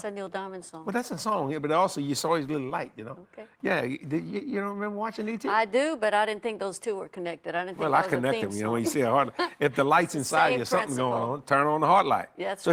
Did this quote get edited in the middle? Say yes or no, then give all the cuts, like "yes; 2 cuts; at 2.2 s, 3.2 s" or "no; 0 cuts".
no; 0 cuts